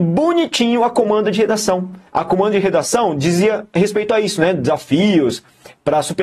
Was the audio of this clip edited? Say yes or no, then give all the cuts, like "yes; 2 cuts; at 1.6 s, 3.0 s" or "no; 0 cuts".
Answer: yes; 1 cut; at 2.1 s